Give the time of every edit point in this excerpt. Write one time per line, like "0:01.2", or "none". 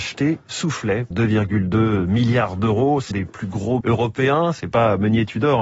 0:01.1
0:03.1
0:03.8